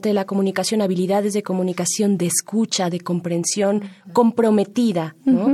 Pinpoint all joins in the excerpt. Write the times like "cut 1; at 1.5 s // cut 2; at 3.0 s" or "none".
none

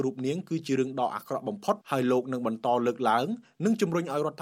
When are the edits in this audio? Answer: cut 1; at 1.8 s

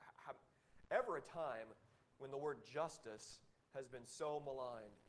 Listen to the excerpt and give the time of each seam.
none

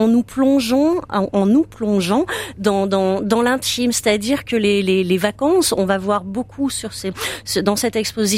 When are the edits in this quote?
none

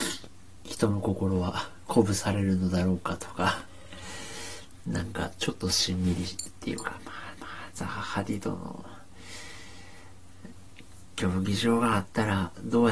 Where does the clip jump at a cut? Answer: cut 1; at 7.4 s

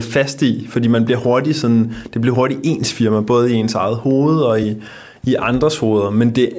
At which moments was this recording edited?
none

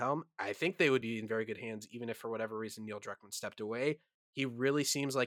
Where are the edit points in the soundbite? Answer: none

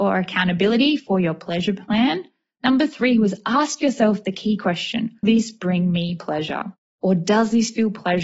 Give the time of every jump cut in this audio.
cut 1; at 5.2 s

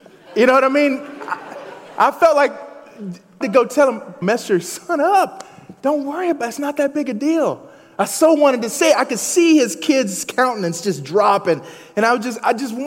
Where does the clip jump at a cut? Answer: cut 1; at 3.4 s // cut 2; at 4.2 s

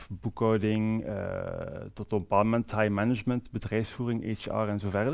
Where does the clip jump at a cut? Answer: none

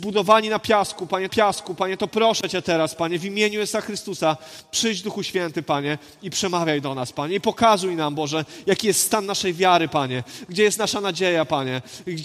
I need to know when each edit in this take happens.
cut 1; at 1.3 s

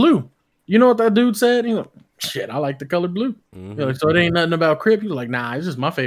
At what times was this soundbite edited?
cut 1; at 3.5 s

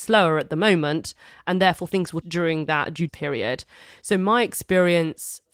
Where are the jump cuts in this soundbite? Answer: cut 1; at 2.2 s // cut 2; at 3.1 s

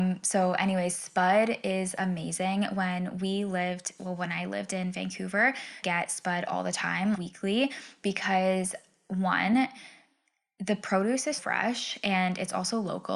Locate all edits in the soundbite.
cut 1; at 5.8 s // cut 2; at 7.1 s // cut 3; at 11.4 s

